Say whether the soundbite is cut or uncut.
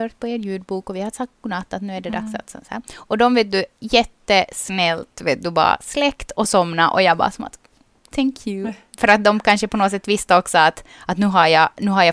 uncut